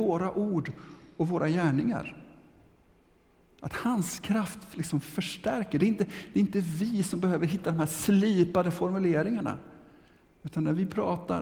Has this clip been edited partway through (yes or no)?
no